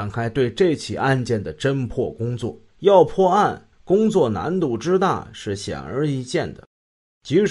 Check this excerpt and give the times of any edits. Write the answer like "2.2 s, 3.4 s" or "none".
2.7 s, 3.7 s